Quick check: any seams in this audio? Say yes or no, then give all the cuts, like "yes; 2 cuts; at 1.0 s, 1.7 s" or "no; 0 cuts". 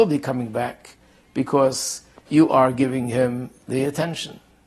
no; 0 cuts